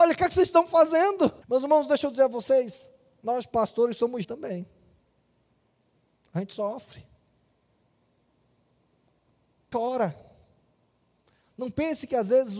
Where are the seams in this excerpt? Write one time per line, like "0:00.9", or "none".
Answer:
0:01.4
0:04.2
0:09.7